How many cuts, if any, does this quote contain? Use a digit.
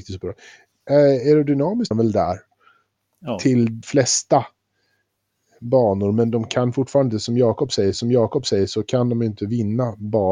3